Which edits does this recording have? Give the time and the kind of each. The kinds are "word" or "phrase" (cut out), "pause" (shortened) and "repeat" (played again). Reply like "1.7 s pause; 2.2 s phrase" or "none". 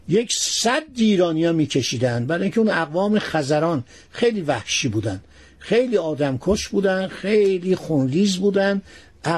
none